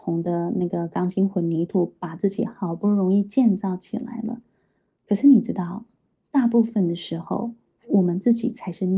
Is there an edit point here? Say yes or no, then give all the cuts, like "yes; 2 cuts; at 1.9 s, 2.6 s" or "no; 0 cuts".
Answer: no; 0 cuts